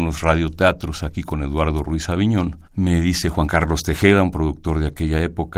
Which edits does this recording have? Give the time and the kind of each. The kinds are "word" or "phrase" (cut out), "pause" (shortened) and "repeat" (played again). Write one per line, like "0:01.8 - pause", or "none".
0:02.6 - pause